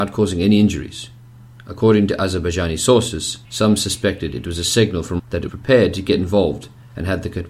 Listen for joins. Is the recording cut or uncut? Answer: cut